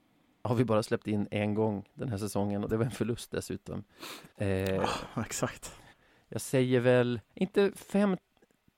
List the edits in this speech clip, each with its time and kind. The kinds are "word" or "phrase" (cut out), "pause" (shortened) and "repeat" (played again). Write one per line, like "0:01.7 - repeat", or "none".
0:04.3 - pause
0:05.9 - pause
0:07.3 - pause